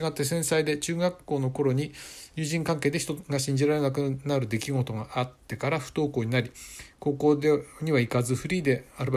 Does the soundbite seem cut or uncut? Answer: cut